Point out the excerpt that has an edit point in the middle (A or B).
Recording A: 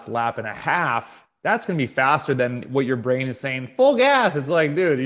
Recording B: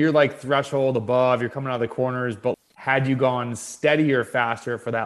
B